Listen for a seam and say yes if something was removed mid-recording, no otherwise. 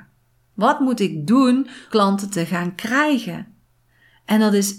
yes